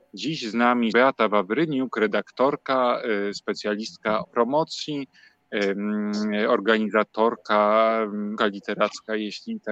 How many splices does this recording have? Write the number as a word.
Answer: three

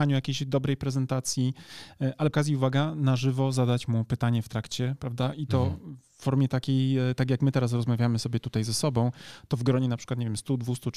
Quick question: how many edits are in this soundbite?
one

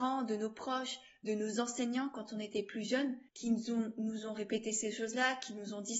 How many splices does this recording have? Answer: one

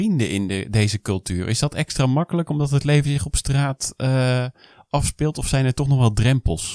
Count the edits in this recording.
zero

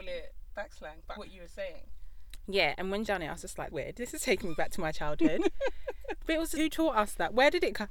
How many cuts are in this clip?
four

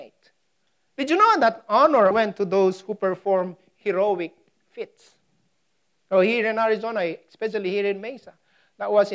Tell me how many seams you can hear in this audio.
one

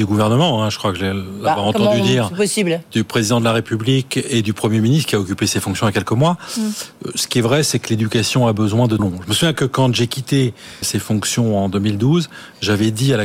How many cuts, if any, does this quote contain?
two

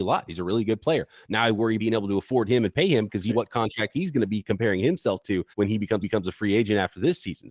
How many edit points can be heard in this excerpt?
four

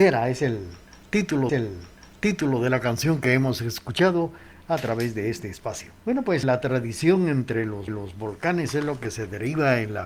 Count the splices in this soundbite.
four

